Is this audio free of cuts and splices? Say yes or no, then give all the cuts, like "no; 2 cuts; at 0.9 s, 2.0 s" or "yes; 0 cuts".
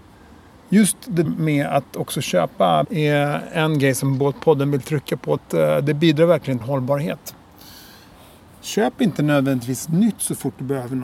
no; 4 cuts; at 1.3 s, 2.8 s, 5.4 s, 6.6 s